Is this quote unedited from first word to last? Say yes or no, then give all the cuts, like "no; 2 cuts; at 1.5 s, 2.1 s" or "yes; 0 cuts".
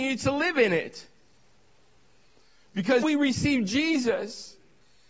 no; 1 cut; at 3.0 s